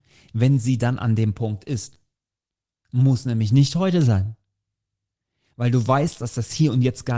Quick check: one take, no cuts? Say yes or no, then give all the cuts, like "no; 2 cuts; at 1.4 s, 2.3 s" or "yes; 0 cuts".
yes; 0 cuts